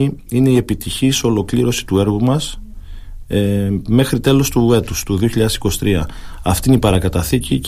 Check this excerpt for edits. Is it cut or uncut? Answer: uncut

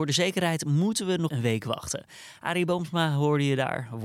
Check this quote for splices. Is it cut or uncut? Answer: cut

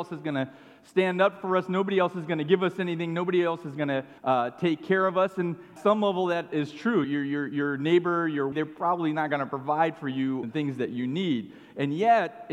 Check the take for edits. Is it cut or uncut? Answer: cut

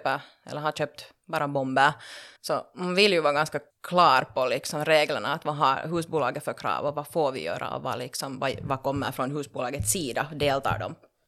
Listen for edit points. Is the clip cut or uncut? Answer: cut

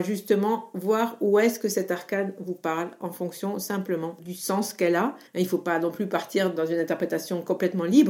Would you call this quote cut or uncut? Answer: cut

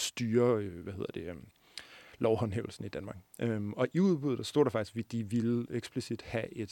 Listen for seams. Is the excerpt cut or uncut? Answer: uncut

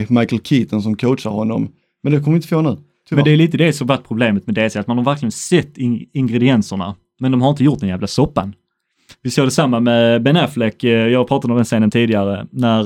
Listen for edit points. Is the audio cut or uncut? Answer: uncut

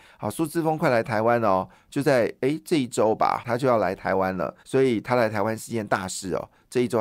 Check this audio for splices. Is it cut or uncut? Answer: cut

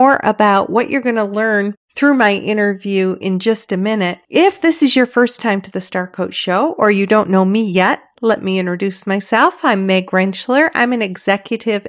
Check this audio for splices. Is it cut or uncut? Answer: cut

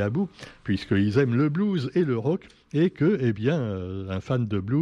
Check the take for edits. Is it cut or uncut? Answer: uncut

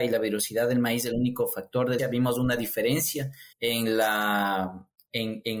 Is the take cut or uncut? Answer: cut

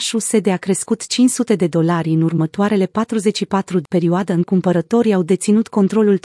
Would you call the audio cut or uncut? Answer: cut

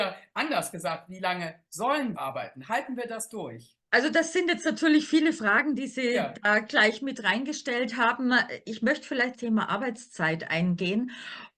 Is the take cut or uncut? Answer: cut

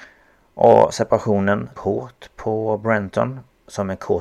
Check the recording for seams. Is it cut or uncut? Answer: cut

